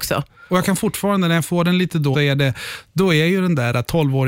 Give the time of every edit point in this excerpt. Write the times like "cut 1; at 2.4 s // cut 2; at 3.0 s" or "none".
cut 1; at 2.1 s